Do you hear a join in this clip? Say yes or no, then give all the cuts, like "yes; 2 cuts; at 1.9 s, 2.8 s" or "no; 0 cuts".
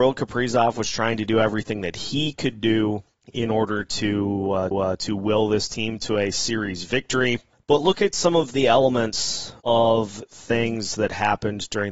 yes; 4 cuts; at 3.2 s, 4.7 s, 7.5 s, 9.6 s